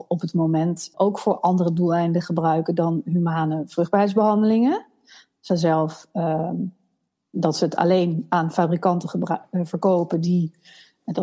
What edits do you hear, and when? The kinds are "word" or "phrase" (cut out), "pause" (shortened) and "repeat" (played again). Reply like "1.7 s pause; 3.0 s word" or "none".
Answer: 0.9 s word; 5.5 s word